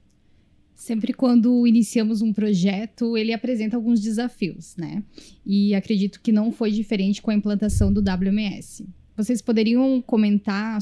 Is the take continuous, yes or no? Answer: yes